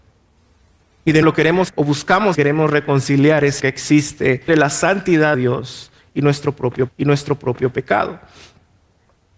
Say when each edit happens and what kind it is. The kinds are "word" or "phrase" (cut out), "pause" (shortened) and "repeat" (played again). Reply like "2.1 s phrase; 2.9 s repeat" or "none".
1.2 s word; 1.7 s word; 2.3 s phrase; 3.6 s word; 4.5 s word; 5.3 s word; 6.9 s repeat